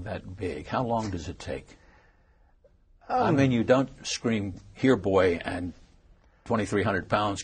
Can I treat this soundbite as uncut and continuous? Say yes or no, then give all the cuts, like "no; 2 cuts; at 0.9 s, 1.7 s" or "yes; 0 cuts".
yes; 0 cuts